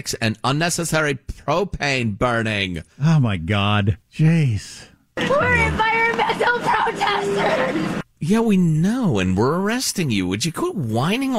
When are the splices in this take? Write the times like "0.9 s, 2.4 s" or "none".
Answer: 2.9 s, 4.0 s, 8.1 s